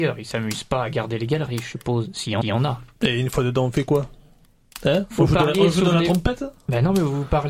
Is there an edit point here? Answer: yes; 1 cut; at 2.4 s

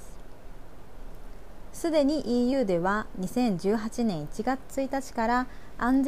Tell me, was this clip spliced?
no; 0 cuts

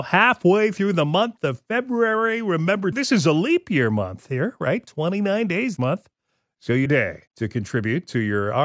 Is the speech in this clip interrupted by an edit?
yes; 4 cuts; at 2.9 s, 5.8 s, 6.9 s, 7.3 s

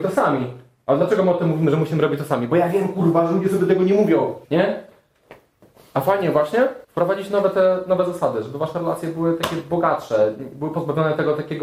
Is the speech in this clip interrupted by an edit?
yes; 2 cuts; at 4.4 s, 6.8 s

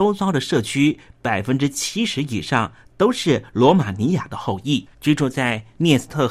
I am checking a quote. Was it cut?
yes; 1 cut; at 4.9 s

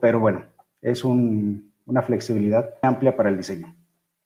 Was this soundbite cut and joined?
yes; 1 cut; at 2.8 s

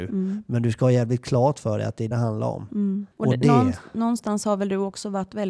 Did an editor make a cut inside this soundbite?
yes; 2 cuts; at 2.1 s, 3.1 s

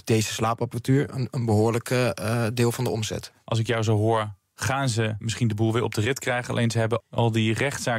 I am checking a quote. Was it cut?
no; 0 cuts

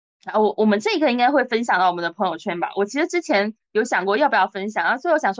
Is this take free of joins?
yes; 0 cuts

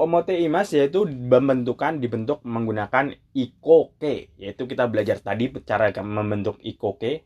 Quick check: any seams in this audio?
no; 0 cuts

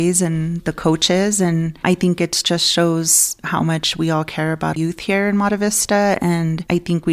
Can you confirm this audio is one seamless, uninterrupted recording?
no; 1 cut; at 4.7 s

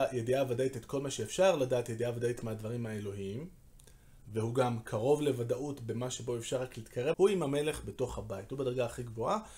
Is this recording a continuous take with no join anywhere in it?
no; 1 cut; at 7.1 s

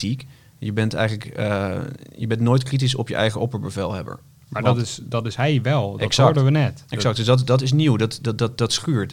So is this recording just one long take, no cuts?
yes; 0 cuts

